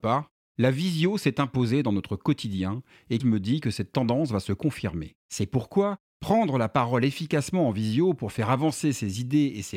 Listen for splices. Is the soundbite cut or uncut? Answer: cut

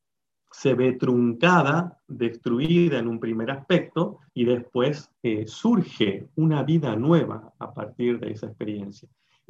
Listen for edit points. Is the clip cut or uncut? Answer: cut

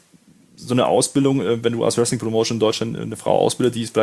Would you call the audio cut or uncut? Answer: uncut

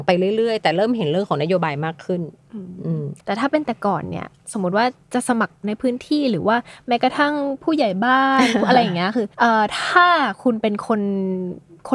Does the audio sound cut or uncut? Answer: cut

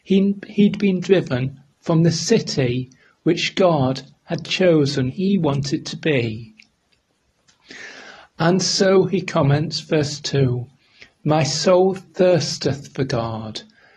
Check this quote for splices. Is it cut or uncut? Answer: cut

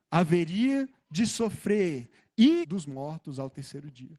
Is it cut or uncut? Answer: cut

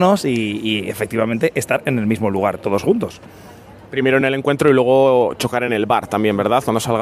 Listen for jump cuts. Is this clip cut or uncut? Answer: uncut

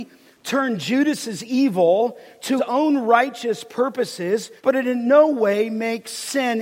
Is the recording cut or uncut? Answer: cut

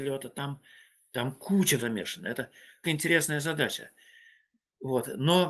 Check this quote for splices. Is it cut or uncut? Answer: cut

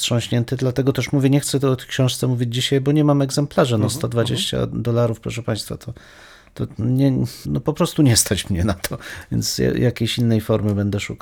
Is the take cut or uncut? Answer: cut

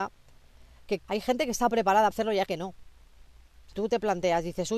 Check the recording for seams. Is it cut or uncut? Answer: cut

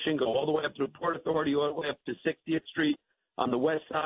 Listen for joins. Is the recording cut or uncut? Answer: uncut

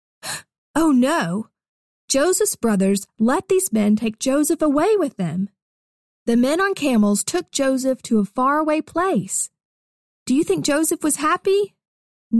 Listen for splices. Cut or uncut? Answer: uncut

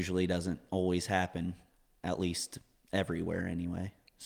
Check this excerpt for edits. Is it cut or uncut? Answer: uncut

